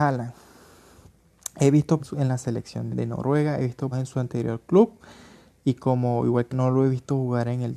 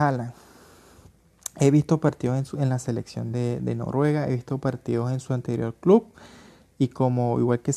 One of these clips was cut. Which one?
first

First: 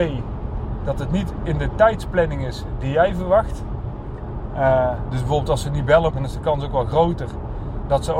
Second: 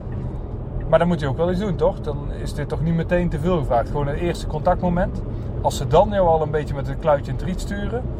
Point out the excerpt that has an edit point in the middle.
first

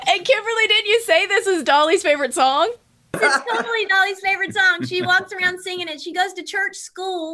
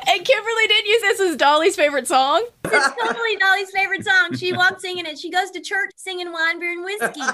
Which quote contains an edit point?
second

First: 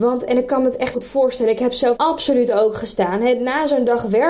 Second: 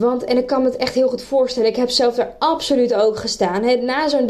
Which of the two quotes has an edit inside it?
first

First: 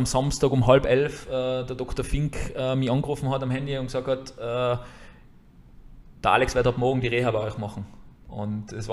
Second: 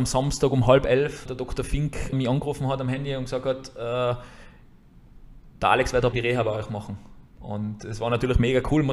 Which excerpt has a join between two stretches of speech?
second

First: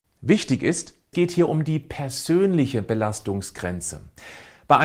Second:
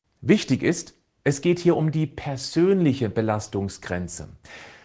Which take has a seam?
first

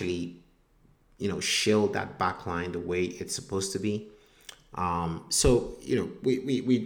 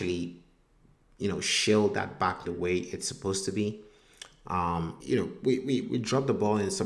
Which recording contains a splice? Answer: second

